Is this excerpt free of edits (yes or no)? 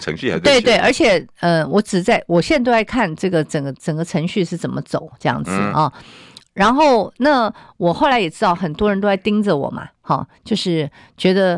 yes